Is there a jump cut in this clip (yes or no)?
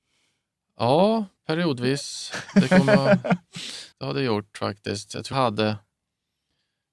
yes